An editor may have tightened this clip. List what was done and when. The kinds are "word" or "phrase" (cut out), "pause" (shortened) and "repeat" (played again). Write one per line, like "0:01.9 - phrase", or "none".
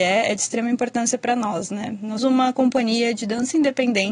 0:02.2 - word